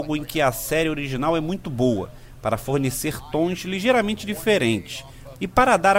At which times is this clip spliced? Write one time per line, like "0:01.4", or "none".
none